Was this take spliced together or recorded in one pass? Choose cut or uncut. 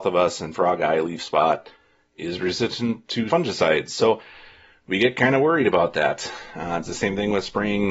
cut